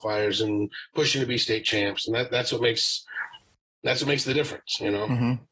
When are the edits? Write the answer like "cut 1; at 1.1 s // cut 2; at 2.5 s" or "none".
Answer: none